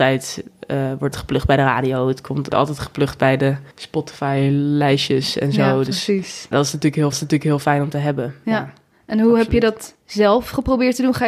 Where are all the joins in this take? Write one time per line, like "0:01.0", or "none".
0:01.1
0:02.5
0:03.7
0:06.5
0:07.1
0:10.0